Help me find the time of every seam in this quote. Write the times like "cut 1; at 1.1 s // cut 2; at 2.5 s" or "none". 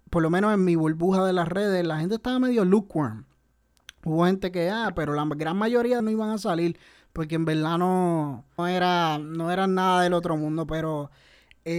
cut 1; at 6.0 s // cut 2; at 8.6 s

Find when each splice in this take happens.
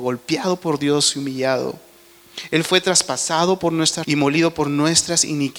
cut 1; at 4.0 s

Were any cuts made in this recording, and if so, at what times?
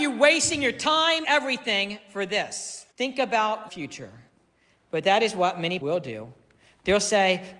cut 1; at 1.2 s // cut 2; at 2.9 s // cut 3; at 3.7 s // cut 4; at 5.8 s

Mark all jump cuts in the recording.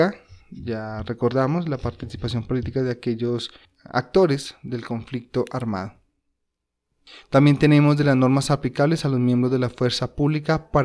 none

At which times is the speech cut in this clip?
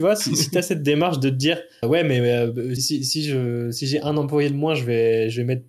cut 1; at 1.8 s // cut 2; at 2.8 s

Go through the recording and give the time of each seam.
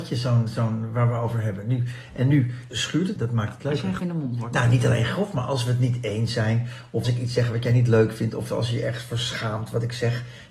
cut 1; at 2.7 s // cut 2; at 3.2 s // cut 3; at 4.0 s // cut 4; at 7.0 s

